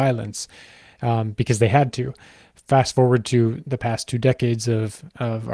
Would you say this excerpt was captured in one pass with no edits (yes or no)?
yes